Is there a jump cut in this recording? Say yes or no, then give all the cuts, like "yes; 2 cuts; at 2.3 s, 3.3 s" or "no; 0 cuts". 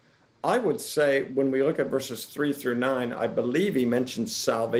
no; 0 cuts